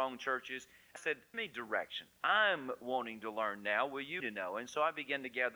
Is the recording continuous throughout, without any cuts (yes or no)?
no